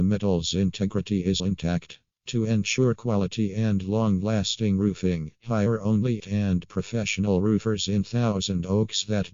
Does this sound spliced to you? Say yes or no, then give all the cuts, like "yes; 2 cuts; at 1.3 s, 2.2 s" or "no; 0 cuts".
yes; 2 cuts; at 1.4 s, 6.2 s